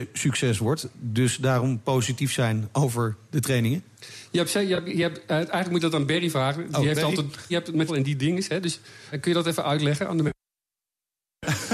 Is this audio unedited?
no; 3 cuts; at 7.5 s, 7.9 s, 9.1 s

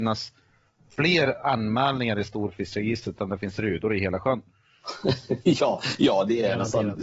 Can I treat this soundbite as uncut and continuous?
yes; 0 cuts

